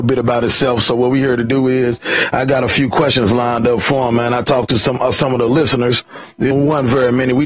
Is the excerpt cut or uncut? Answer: cut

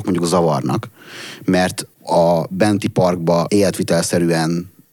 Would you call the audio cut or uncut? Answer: cut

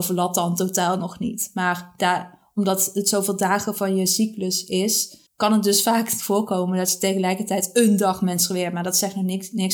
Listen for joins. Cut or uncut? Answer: cut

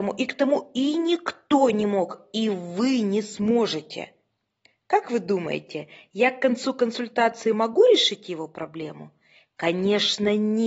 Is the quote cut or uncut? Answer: uncut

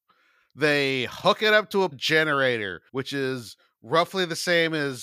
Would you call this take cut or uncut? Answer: cut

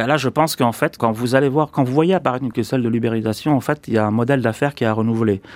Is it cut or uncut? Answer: cut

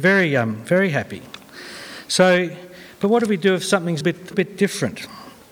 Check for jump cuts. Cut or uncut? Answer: cut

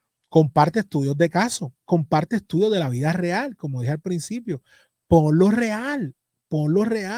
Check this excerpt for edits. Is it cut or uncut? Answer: uncut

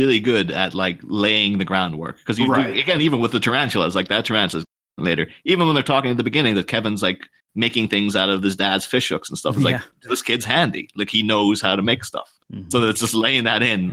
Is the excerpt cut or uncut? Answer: uncut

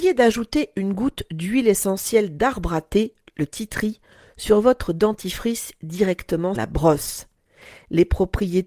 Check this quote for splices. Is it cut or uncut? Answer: cut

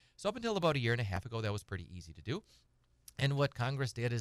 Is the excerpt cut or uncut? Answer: uncut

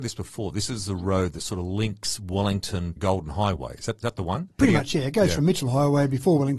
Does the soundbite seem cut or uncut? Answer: cut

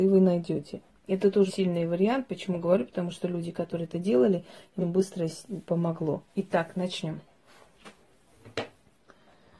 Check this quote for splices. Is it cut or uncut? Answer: cut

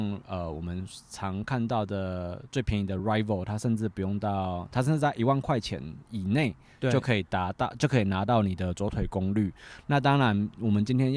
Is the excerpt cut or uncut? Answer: uncut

